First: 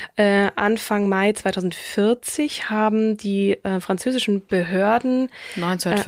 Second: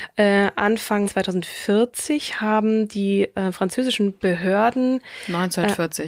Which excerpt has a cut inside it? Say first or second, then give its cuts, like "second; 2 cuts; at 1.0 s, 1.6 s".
second; 1 cut; at 1.0 s